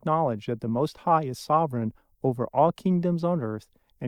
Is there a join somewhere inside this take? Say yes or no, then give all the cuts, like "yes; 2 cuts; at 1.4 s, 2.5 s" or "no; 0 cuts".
no; 0 cuts